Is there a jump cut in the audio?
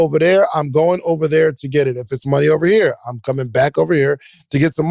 no; 0 cuts

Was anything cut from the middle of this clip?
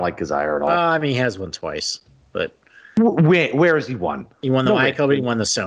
no; 0 cuts

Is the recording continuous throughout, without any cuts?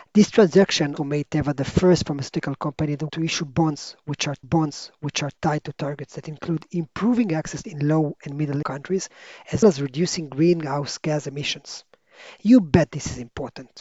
no; 6 cuts; at 1.0 s, 3.1 s, 4.4 s, 7.6 s, 8.6 s, 9.6 s

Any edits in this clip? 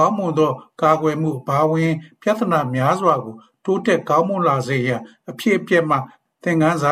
no; 0 cuts

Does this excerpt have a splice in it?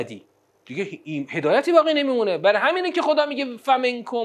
no; 0 cuts

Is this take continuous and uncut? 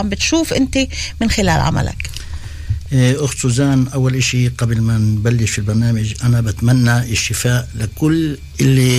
yes; 0 cuts

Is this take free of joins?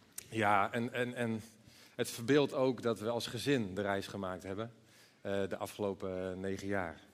yes; 0 cuts

